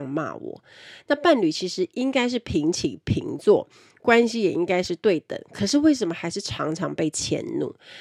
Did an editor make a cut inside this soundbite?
no; 0 cuts

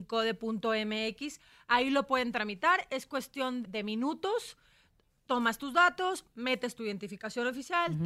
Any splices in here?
yes; 1 cut; at 3.6 s

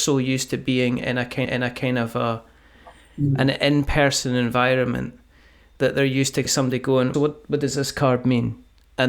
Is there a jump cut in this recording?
yes; 3 cuts; at 1.4 s, 6.4 s, 7.1 s

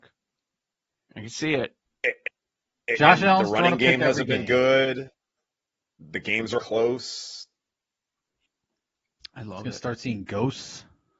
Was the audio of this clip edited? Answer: yes; 1 cut; at 6.6 s

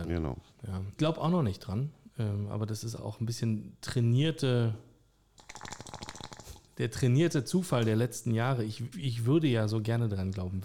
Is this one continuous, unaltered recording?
no; 4 cuts; at 1.0 s, 3.0 s, 6.7 s, 8.9 s

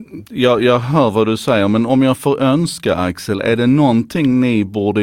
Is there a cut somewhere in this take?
no; 0 cuts

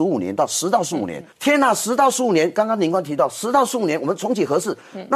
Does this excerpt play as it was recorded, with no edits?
no; 1 cut; at 1.3 s

